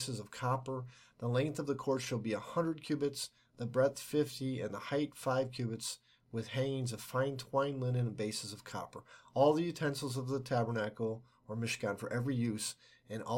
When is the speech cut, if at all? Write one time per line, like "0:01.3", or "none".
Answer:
none